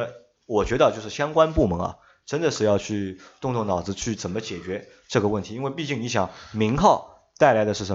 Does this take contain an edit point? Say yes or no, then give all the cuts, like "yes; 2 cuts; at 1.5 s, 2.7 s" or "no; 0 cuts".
no; 0 cuts